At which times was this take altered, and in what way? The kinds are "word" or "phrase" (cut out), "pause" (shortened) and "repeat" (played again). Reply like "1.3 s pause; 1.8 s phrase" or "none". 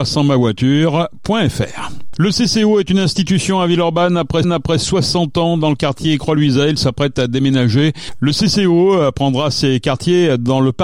4.4 s repeat